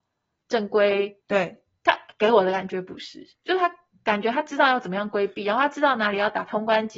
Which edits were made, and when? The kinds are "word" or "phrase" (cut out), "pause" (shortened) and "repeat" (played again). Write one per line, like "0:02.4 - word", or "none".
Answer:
0:01.2 - pause